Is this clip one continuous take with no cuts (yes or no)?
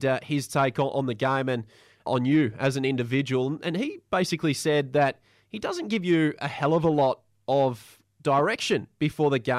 yes